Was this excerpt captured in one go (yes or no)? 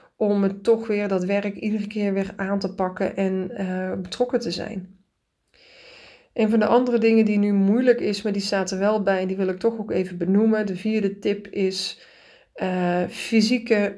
yes